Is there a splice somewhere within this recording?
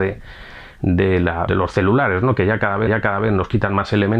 yes; 2 cuts; at 1.5 s, 2.9 s

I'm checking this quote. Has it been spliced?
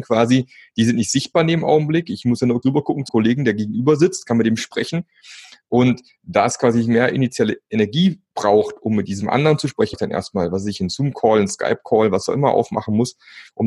yes; 3 cuts; at 2.6 s, 3.1 s, 9.9 s

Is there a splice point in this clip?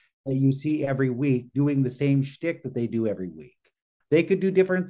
no; 0 cuts

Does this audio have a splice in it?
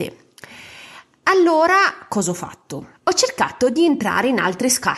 yes; 1 cut; at 2.9 s

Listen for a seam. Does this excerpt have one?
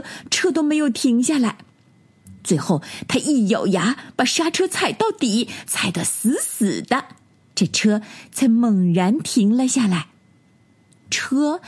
no; 0 cuts

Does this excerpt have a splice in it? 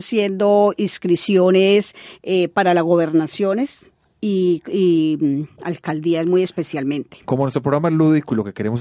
yes; 1 cut; at 4.1 s

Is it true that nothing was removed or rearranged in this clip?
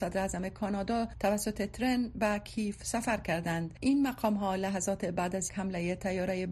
no; 1 cut; at 5.5 s

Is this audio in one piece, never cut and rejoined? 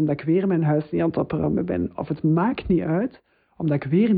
yes; 0 cuts

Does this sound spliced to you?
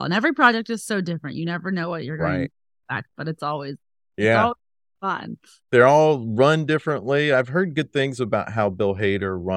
no; 0 cuts

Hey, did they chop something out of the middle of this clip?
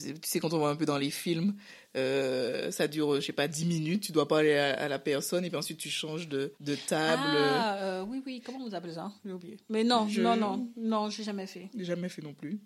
yes; 1 cut; at 6.6 s

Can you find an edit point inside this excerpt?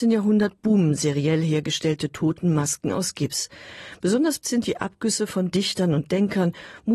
yes; 2 cuts; at 4.4 s, 5.5 s

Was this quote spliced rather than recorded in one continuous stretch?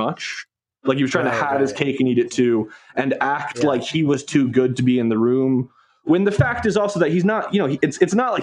no; 0 cuts

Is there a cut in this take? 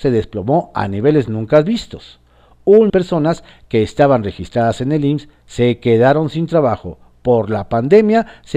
yes; 1 cut; at 2.9 s

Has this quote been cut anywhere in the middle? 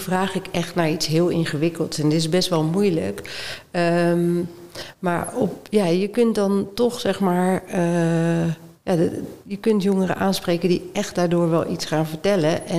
no; 0 cuts

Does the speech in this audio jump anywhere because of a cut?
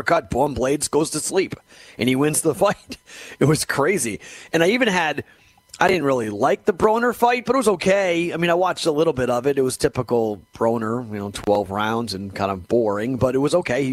no; 0 cuts

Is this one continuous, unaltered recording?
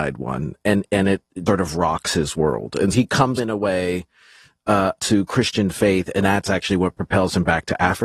no; 5 cuts; at 1.5 s, 2.9 s, 3.4 s, 5.0 s, 6.2 s

